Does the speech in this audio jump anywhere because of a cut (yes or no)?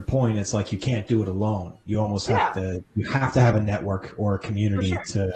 no